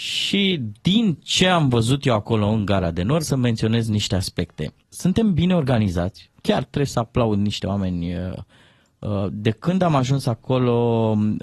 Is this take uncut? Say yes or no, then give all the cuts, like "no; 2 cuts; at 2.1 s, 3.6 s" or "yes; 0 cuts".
no; 3 cuts; at 3.2 s, 4.8 s, 6.4 s